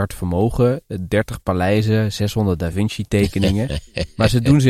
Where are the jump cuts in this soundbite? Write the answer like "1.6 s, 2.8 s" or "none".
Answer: none